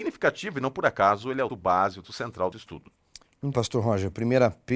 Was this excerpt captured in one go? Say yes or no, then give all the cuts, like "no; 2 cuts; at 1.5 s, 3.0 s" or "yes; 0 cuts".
no; 4 cuts; at 1.5 s, 2.0 s, 2.5 s, 3.5 s